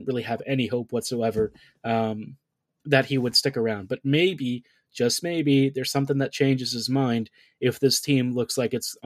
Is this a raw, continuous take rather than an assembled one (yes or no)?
yes